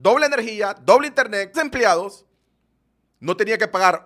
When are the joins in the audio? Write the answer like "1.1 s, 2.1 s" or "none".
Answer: 1.5 s